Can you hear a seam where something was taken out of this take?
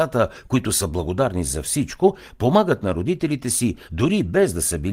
no; 0 cuts

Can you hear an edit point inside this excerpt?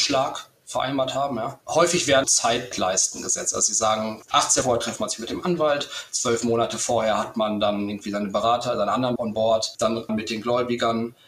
yes; 4 cuts; at 2.2 s, 4.6 s, 9.2 s, 10.1 s

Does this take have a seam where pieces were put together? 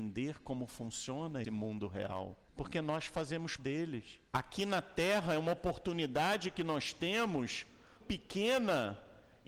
yes; 5 cuts; at 1.4 s, 2.5 s, 3.6 s, 4.3 s, 8.0 s

